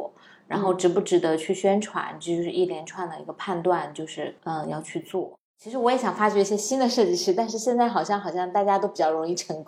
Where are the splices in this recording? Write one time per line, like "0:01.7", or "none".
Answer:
0:04.4
0:05.5